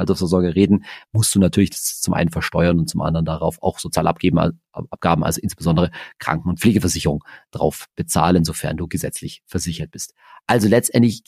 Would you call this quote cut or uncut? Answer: uncut